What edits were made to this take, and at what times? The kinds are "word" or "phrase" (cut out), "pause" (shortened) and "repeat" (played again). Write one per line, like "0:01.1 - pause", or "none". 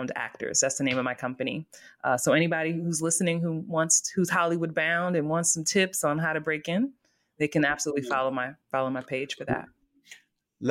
0:08.6 - pause